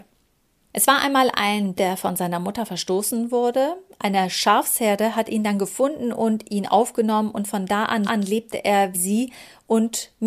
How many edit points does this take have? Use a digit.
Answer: 3